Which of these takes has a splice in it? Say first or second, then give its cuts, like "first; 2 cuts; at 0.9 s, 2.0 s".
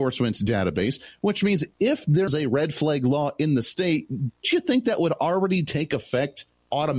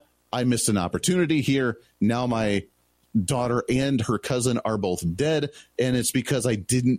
first; 2 cuts; at 2.3 s, 4.4 s